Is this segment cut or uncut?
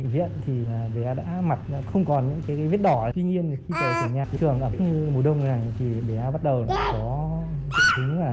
cut